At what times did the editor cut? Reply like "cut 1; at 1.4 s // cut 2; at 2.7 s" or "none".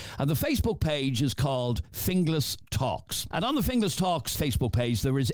cut 1; at 4.3 s